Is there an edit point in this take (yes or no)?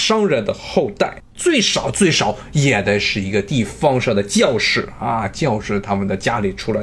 yes